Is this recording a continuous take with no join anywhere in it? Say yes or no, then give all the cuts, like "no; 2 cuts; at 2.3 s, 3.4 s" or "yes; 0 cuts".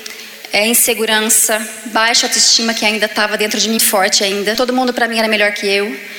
no; 1 cut; at 3.8 s